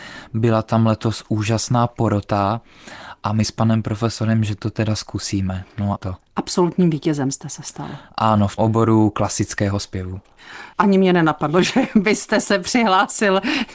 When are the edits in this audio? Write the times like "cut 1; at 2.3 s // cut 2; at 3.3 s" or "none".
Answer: cut 1; at 3.4 s // cut 2; at 6.0 s // cut 3; at 8.6 s // cut 4; at 10.7 s